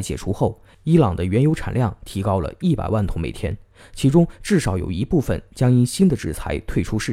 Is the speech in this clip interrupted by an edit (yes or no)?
no